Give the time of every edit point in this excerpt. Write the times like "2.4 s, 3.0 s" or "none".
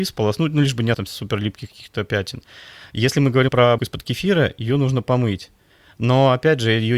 0.9 s, 3.5 s, 3.8 s